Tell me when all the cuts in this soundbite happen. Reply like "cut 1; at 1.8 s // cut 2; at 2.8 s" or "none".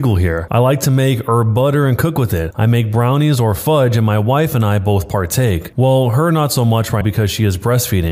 cut 1; at 7.0 s